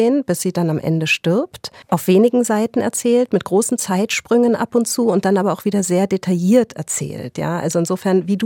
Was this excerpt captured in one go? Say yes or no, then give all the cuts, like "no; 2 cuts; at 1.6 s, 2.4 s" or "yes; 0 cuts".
no; 1 cut; at 1.8 s